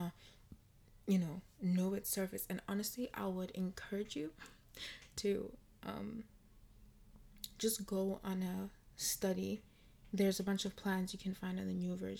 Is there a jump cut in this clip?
yes; 1 cut; at 1.0 s

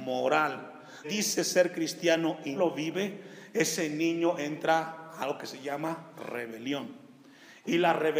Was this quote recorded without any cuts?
no; 2 cuts; at 1.0 s, 2.6 s

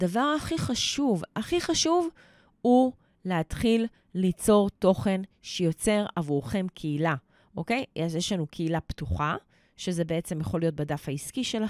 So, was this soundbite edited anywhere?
no; 0 cuts

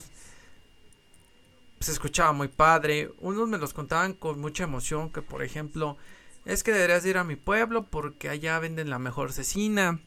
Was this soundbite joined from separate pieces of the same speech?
no; 0 cuts

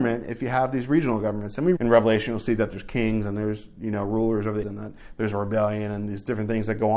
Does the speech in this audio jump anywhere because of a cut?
yes; 2 cuts; at 1.8 s, 4.6 s

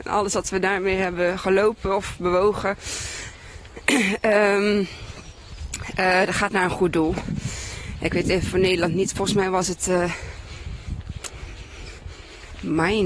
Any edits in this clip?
no; 0 cuts

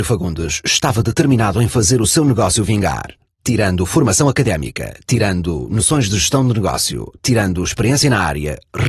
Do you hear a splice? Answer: no; 0 cuts

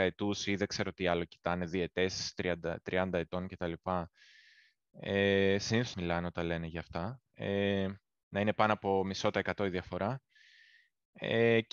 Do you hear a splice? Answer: yes; 1 cut; at 5.9 s

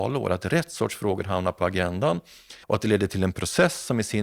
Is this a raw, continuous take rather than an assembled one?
no; 1 cut; at 2.6 s

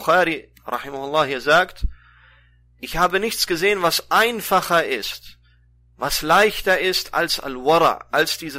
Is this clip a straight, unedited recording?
yes; 0 cuts

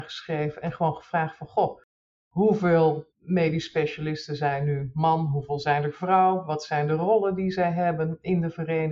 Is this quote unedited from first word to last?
no; 1 cut; at 3.1 s

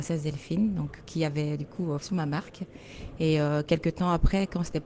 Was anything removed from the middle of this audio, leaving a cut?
yes; 1 cut; at 2.0 s

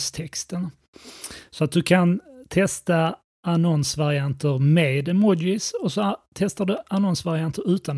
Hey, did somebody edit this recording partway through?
no; 0 cuts

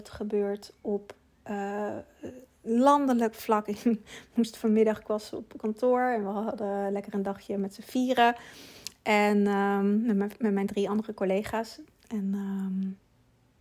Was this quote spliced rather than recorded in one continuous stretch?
no; 0 cuts

